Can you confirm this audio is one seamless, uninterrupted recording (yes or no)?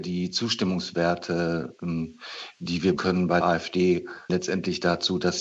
no